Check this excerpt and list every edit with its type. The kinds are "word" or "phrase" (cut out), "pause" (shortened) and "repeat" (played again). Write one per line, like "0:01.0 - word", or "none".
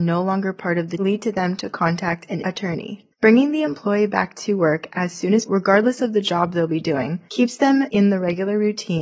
0:01.0 - phrase
0:02.4 - word
0:03.1 - pause
0:05.5 - word
0:07.3 - pause

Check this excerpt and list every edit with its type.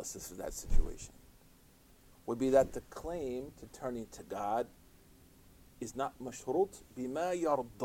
none

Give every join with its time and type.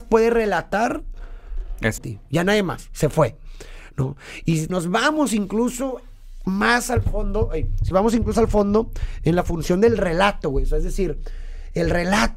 0:02.0 - phrase
0:04.7 - phrase
0:07.9 - word
0:08.3 - word

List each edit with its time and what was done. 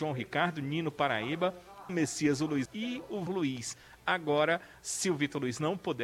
0:01.9 - word
0:02.7 - word
0:03.3 - word

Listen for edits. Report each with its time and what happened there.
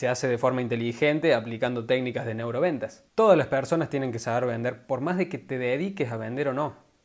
0:03.1 - pause

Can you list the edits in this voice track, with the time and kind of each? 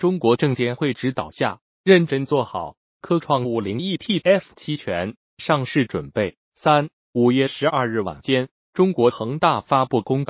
0:06.4 - pause

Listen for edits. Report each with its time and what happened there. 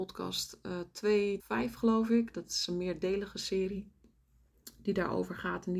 0:01.4 - word

